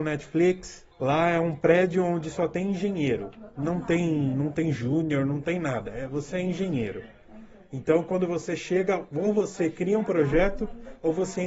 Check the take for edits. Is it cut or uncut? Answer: cut